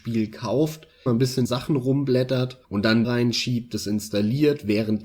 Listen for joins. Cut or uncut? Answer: cut